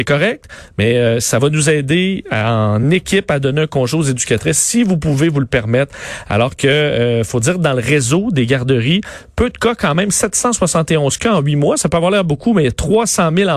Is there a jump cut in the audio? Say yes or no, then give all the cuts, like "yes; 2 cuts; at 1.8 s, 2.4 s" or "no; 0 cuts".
no; 0 cuts